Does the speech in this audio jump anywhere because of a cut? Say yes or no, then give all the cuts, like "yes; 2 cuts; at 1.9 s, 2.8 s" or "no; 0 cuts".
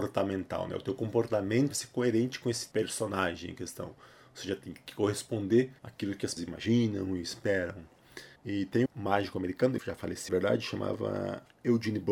yes; 8 cuts; at 1.7 s, 2.7 s, 5.8 s, 6.4 s, 8.4 s, 8.9 s, 9.8 s, 10.3 s